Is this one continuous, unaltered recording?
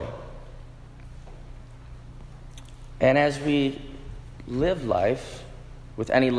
yes; 0 cuts

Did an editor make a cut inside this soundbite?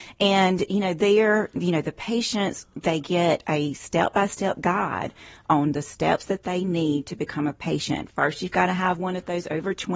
no; 0 cuts

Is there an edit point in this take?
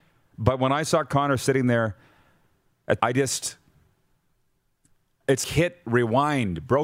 yes; 2 cuts; at 3.0 s, 5.4 s

